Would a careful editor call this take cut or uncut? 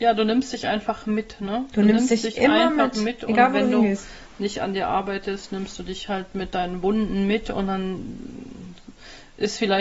uncut